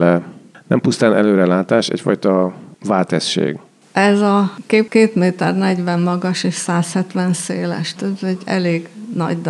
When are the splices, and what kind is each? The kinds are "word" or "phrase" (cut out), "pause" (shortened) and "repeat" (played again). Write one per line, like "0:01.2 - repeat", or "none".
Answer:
0:02.7 - pause
0:04.9 - word
0:08.0 - word